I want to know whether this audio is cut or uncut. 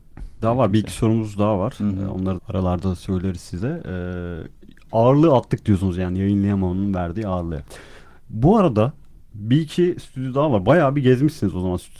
cut